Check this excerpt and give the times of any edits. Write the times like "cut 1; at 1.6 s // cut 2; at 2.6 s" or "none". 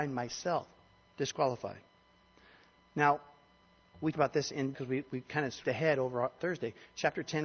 cut 1; at 4.1 s // cut 2; at 4.7 s // cut 3; at 5.6 s // cut 4; at 6.4 s